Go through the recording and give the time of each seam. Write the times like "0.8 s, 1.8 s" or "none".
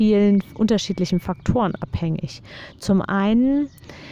none